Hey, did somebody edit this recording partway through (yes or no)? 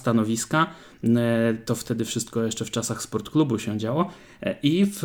no